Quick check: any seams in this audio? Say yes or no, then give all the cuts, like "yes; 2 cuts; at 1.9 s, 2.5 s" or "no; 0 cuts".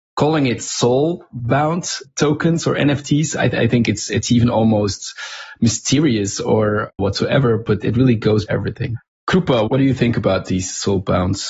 yes; 4 cuts; at 4.1 s, 7.0 s, 7.8 s, 8.5 s